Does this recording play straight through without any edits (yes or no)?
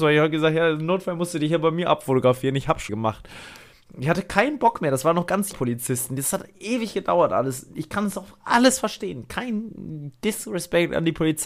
no